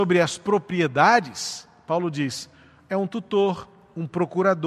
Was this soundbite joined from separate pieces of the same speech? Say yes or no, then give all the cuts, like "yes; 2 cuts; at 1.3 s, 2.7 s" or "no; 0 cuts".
no; 0 cuts